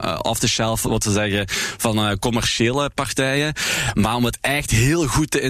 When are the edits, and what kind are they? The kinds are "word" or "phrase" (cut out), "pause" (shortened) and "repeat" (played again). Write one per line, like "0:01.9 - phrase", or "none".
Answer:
none

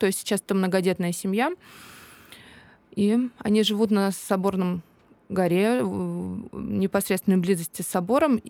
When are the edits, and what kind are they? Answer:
none

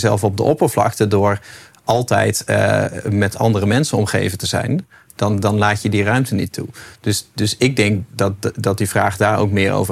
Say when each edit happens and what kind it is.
none

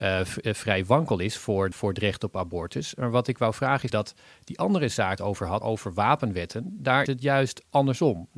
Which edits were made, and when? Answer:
0:01.7 - word
0:03.9 - word
0:05.2 - phrase
0:05.6 - word
0:07.1 - word

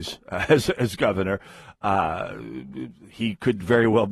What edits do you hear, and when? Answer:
none

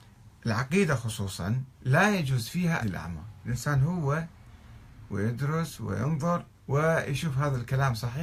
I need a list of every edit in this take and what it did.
0:01.7 - pause
0:02.8 - word
0:03.4 - word
0:05.1 - word
0:06.5 - pause

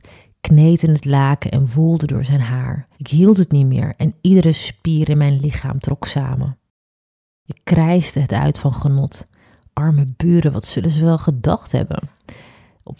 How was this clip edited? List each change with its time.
0:02.9 - pause

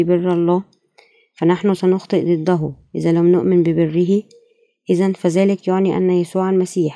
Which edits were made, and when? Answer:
none

